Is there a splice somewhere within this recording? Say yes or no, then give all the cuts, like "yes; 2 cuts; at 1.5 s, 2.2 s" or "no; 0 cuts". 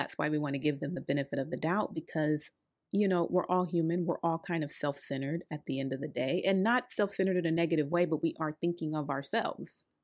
no; 0 cuts